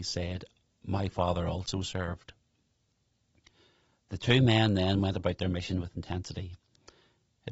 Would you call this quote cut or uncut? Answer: uncut